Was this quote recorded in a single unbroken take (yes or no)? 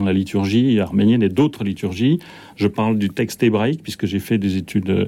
yes